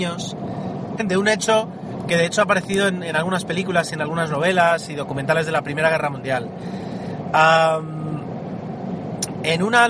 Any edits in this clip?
yes; 1 cut; at 1.0 s

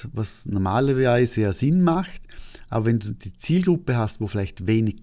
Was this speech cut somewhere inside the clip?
no; 0 cuts

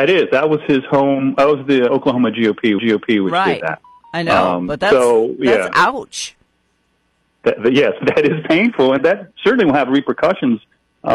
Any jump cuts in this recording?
yes; 4 cuts; at 1.9 s, 2.8 s, 8.0 s, 9.0 s

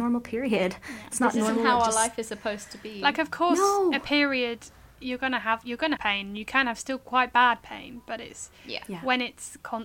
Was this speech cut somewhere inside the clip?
yes; 1 cut; at 6.0 s

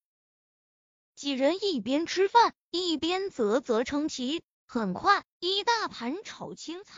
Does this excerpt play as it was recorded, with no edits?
no; 1 cut; at 4.5 s

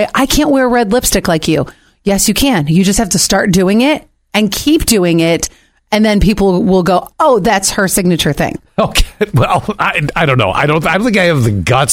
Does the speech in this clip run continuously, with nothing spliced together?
yes; 0 cuts

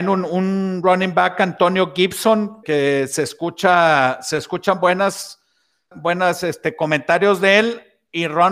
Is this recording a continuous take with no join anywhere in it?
no; 2 cuts; at 2.6 s, 5.9 s

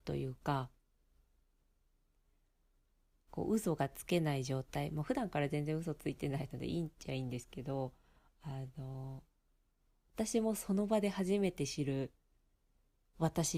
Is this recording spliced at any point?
no; 0 cuts

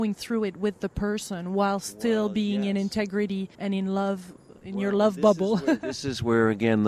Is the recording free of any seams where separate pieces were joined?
no; 2 cuts; at 3.5 s, 4.6 s

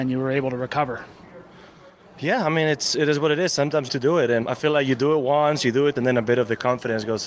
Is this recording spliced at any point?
yes; 3 cuts; at 3.9 s, 4.4 s, 6.0 s

